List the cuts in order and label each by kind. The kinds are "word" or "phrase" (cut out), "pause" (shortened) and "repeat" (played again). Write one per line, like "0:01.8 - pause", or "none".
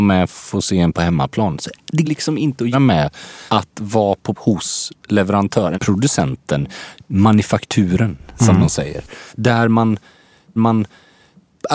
0:00.9 - word
0:02.0 - word
0:02.7 - word
0:03.5 - pause
0:04.4 - word
0:05.7 - word
0:09.3 - pause
0:10.6 - repeat